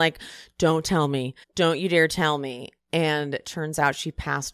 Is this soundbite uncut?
no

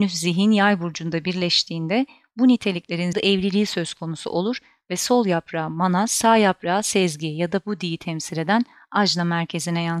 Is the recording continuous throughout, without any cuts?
no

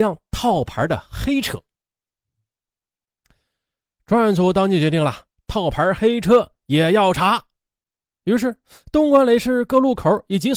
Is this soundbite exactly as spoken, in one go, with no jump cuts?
yes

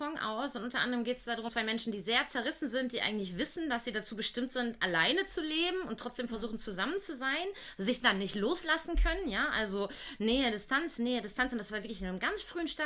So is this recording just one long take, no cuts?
no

